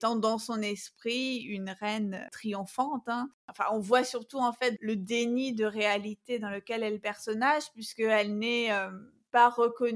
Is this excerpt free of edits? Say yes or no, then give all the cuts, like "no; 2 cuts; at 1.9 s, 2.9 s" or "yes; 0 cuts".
no; 2 cuts; at 2.3 s, 3.4 s